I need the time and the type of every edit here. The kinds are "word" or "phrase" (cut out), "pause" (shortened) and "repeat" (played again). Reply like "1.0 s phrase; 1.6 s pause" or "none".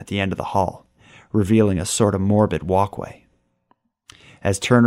none